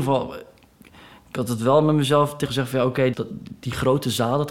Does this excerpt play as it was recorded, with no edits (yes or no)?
no